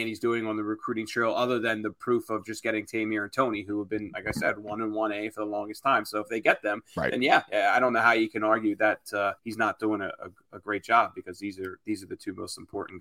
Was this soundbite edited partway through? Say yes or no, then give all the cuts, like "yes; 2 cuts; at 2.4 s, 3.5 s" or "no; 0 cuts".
yes; 1 cut; at 9.4 s